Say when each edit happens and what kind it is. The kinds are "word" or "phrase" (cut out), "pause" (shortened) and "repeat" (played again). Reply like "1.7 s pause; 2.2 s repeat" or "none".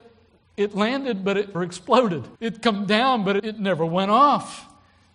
1.5 s word; 2.4 s pause; 3.4 s word